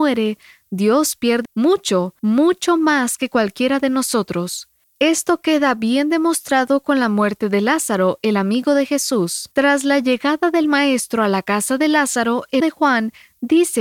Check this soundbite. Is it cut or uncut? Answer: cut